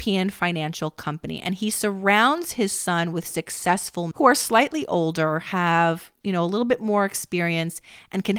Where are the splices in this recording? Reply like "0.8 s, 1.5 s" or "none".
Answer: 4.1 s